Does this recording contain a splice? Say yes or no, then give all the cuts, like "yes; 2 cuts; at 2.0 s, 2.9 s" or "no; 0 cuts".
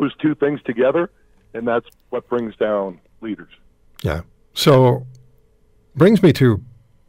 no; 0 cuts